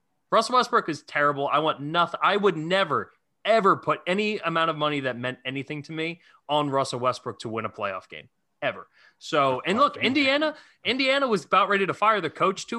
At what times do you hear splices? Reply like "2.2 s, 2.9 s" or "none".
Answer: none